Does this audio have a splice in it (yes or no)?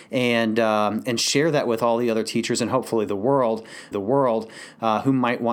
yes